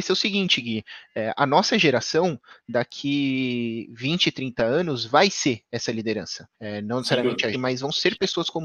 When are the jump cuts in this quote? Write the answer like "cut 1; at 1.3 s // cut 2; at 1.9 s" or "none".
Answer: cut 1; at 6.5 s // cut 2; at 7.5 s